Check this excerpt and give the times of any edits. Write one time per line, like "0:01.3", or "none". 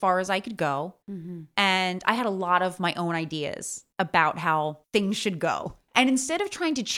0:01.0
0:03.9
0:04.8